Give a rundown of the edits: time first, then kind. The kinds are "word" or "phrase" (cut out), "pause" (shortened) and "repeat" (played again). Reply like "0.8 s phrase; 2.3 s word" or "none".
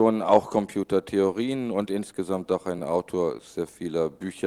none